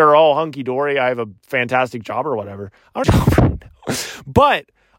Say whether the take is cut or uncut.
cut